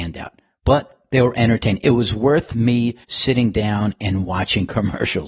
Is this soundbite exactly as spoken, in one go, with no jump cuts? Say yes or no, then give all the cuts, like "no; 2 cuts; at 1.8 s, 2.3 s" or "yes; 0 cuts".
no; 1 cut; at 3.0 s